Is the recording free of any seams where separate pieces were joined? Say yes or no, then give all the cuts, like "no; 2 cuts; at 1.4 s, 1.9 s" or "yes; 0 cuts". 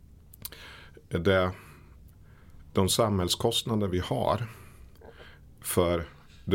yes; 0 cuts